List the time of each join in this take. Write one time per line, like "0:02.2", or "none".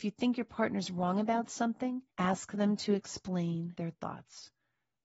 0:02.1